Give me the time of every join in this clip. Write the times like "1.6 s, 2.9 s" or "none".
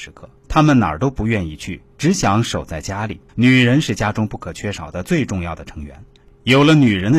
3.3 s